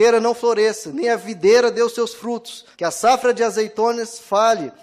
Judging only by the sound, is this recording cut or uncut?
cut